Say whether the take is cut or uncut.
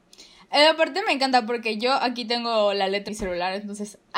cut